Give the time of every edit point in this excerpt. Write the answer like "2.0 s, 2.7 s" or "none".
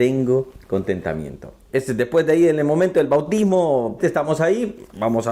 4.0 s